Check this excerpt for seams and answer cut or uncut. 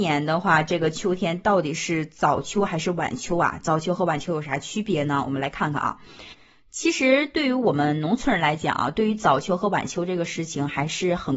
uncut